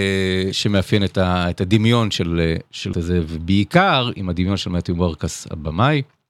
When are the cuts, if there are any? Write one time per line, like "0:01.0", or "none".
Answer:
0:02.9